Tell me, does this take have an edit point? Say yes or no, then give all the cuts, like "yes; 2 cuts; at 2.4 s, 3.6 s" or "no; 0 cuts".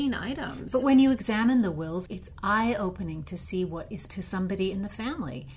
yes; 2 cuts; at 2.1 s, 4.1 s